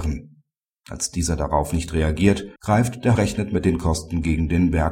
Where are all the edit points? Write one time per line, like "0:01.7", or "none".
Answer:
0:02.6
0:03.2